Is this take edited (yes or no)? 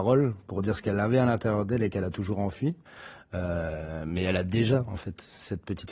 no